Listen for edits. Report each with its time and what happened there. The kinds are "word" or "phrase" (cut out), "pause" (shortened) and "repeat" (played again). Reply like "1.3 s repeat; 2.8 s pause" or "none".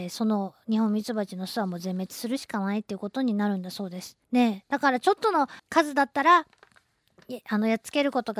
4.2 s pause; 5.6 s pause